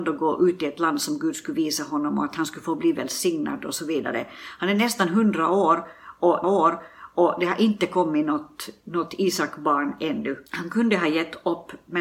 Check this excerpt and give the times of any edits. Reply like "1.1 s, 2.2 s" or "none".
6.4 s, 10.5 s